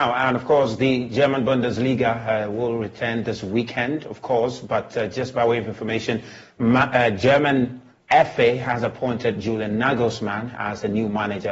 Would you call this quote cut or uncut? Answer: uncut